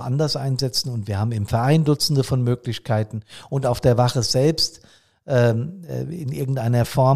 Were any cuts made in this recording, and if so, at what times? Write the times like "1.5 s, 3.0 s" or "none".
none